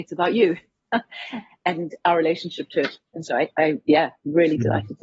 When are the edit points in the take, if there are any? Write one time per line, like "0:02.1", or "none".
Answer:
none